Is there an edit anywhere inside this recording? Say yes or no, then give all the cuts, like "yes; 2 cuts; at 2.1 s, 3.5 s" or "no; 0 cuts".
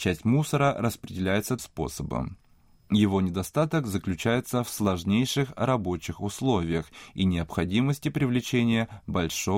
yes; 1 cut; at 1.6 s